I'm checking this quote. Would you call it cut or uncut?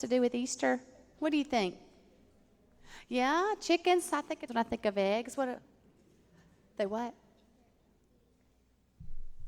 cut